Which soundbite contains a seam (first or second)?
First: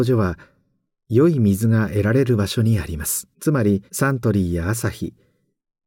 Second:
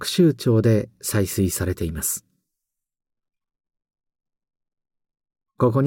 first